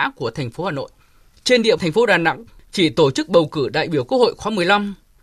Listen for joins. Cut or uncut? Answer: cut